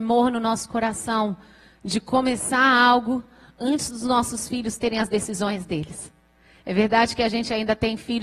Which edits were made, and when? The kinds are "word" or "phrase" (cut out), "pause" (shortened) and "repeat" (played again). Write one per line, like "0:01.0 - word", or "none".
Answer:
none